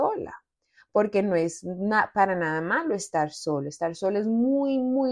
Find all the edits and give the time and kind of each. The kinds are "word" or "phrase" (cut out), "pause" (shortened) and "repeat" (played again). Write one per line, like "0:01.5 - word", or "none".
none